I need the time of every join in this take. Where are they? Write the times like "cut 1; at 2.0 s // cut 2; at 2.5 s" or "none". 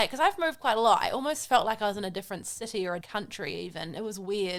cut 1; at 3.0 s